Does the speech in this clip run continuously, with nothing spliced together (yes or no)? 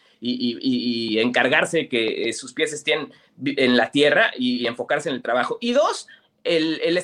yes